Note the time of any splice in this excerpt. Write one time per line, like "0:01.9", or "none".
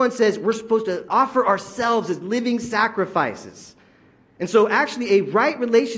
0:01.1